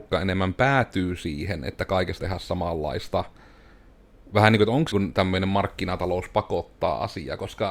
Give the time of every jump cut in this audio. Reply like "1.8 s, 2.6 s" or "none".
2.2 s, 4.9 s